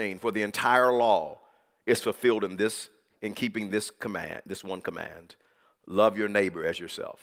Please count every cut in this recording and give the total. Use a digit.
0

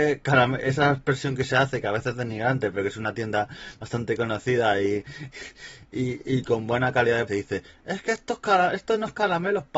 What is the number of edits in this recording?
1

